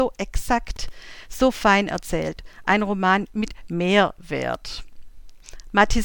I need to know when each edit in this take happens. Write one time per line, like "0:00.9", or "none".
none

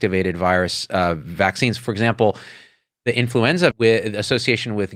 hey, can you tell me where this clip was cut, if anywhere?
0:03.7

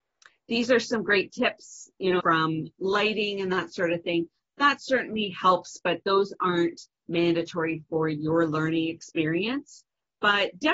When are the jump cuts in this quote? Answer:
0:02.2

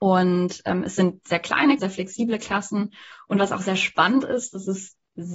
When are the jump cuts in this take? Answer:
0:01.8

